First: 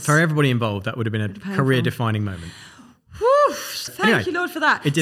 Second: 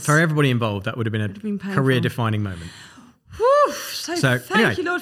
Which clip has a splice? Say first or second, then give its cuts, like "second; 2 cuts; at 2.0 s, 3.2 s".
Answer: first; 2 cuts; at 1.4 s, 3.9 s